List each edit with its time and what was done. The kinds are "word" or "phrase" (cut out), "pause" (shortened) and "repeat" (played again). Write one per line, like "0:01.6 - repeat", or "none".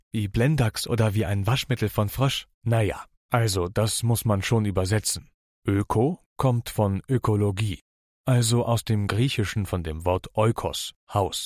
0:02.5 - pause